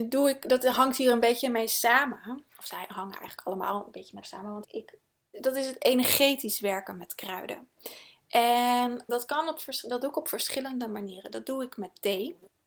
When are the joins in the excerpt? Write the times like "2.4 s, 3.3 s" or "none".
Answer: 2.5 s, 4.2 s, 4.6 s, 5.3 s, 9.1 s